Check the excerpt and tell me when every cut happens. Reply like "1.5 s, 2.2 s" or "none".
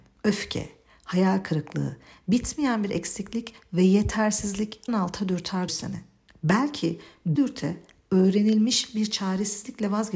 4.9 s, 5.7 s, 7.4 s